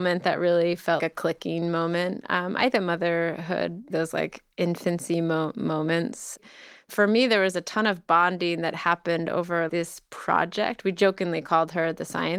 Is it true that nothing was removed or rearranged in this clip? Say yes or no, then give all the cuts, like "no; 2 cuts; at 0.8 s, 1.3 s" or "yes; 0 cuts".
no; 4 cuts; at 1.0 s, 2.7 s, 3.9 s, 9.7 s